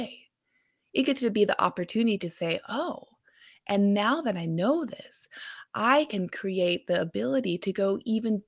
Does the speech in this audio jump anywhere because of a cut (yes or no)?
no